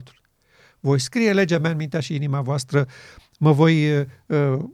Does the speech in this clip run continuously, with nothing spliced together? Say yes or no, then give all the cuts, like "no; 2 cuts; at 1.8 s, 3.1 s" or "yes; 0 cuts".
yes; 0 cuts